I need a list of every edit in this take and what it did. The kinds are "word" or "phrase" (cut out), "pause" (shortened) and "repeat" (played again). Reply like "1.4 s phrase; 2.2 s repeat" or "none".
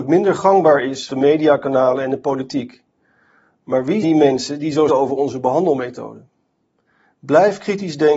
1.1 s word; 4.0 s word; 4.9 s word